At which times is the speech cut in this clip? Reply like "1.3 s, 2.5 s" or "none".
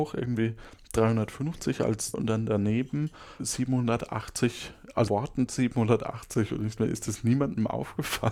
2.1 s, 3.4 s, 5.1 s, 5.5 s, 6.8 s